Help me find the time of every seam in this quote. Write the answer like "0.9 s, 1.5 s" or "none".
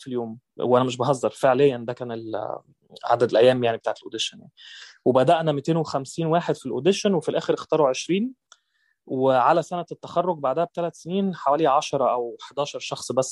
none

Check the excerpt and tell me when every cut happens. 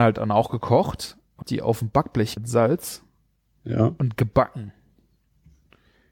1.4 s, 2.4 s

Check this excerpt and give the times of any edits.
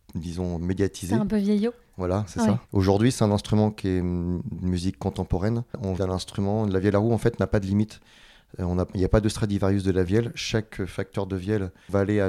2.7 s, 6.0 s

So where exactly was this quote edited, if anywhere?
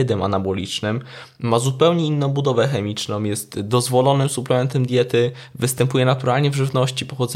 none

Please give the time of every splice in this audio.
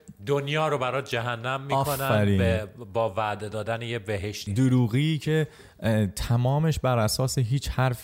4.5 s

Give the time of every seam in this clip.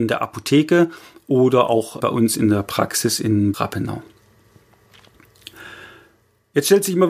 2.0 s, 3.5 s

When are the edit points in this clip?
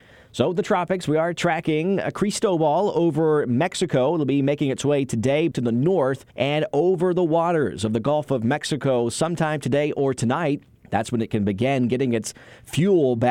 5.5 s, 6.3 s, 10.8 s

